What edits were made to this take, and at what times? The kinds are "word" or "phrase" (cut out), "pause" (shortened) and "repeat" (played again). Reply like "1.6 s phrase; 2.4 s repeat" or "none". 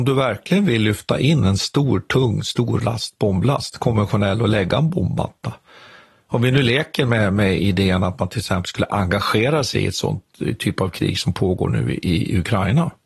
none